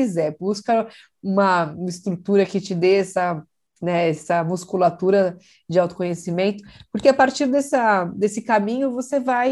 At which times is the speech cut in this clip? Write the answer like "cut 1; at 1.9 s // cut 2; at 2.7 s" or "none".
none